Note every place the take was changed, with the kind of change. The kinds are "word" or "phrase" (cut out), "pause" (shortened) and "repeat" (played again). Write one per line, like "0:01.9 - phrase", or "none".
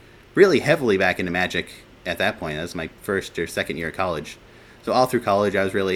none